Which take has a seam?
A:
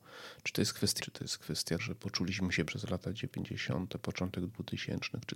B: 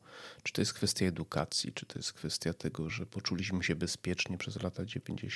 A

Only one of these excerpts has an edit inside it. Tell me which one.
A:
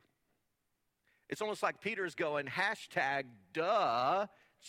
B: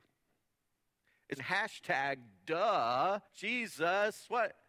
B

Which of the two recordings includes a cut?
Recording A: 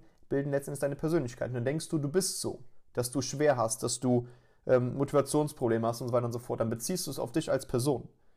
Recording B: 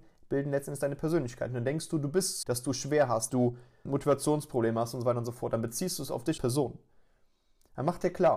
B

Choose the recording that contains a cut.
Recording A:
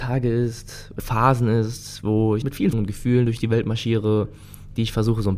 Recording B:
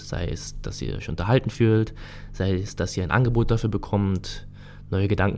A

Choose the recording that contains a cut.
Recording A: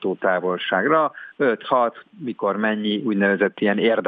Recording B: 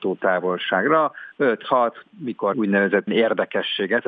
B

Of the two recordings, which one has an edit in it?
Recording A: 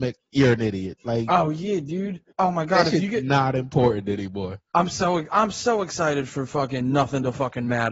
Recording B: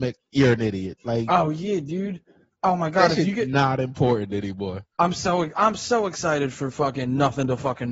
A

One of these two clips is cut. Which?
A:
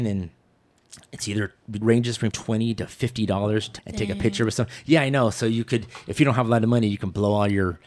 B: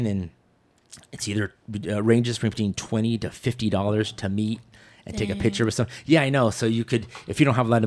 A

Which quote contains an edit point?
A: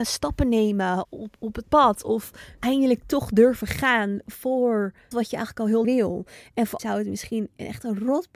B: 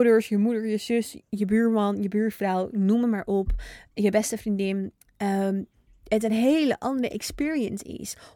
A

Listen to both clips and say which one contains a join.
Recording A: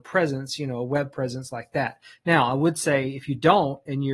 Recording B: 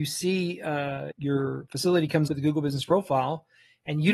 B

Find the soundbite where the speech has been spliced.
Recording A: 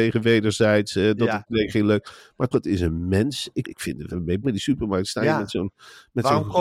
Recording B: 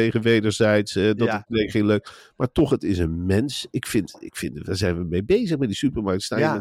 A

